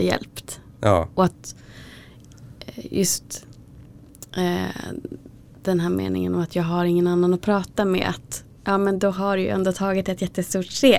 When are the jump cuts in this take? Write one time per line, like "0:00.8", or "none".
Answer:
none